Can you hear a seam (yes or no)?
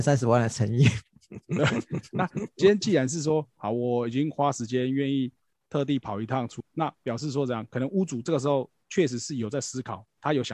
no